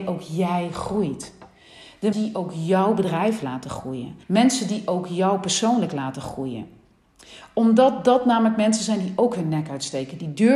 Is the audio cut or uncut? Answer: cut